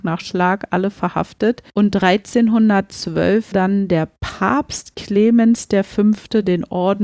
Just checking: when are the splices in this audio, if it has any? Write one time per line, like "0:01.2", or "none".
0:01.7
0:03.5